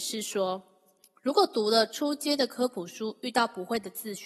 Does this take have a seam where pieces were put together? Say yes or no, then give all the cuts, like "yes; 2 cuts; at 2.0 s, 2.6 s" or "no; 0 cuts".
yes; 1 cut; at 1.2 s